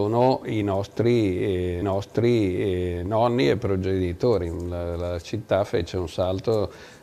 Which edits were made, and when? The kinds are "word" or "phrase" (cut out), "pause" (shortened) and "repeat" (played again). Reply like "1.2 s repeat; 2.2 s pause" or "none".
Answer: 1.8 s repeat